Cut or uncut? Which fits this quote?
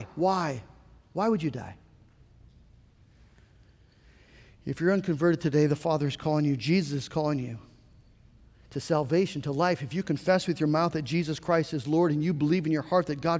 uncut